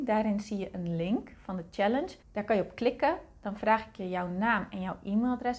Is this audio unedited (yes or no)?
no